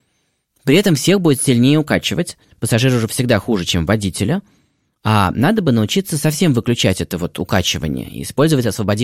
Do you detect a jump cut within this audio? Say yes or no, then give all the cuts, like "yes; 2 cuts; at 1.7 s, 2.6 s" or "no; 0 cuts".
no; 0 cuts